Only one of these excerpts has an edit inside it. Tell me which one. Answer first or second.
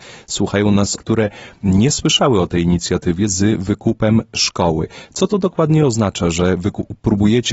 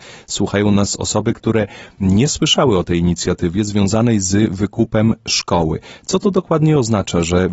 first